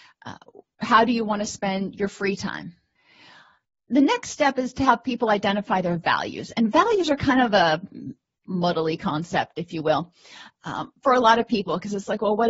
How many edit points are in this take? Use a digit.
0